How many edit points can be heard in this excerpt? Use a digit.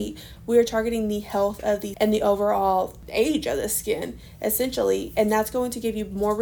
1